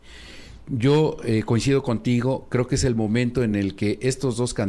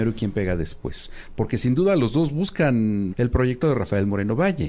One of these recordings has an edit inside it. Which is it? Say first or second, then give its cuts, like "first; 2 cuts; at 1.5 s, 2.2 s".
second; 1 cut; at 3.1 s